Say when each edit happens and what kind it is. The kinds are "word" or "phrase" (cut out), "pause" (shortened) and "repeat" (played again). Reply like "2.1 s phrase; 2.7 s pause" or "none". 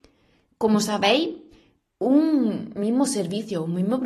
none